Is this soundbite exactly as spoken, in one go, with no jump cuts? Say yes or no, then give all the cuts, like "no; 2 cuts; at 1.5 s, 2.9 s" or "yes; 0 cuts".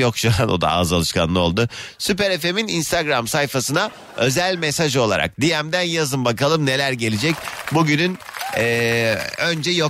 yes; 0 cuts